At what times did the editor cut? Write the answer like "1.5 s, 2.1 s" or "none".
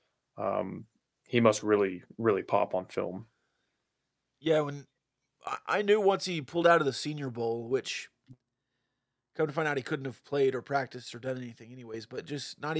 none